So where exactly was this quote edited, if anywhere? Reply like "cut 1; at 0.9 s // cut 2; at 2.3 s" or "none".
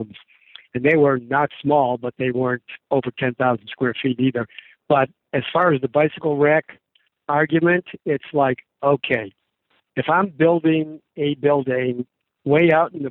none